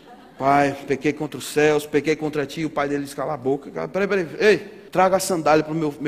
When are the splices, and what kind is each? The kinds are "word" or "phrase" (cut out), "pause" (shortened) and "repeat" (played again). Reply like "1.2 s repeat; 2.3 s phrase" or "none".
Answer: 4.9 s pause